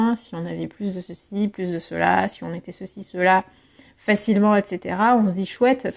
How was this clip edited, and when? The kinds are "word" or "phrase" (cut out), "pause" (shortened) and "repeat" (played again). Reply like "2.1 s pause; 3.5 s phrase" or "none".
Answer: none

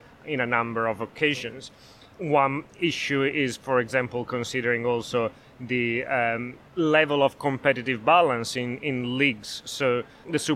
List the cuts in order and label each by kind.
6.7 s pause

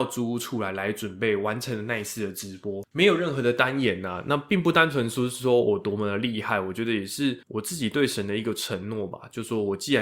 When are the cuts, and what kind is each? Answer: 7.4 s pause

